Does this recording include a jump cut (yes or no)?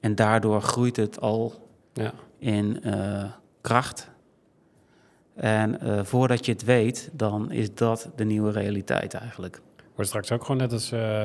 no